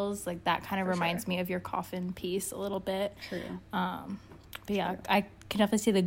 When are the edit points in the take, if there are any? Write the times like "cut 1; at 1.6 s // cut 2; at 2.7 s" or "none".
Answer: none